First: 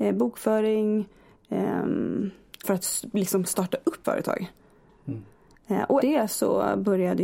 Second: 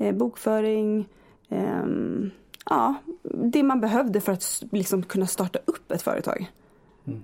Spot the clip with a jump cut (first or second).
first